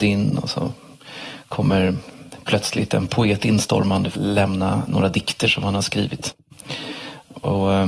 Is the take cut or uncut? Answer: cut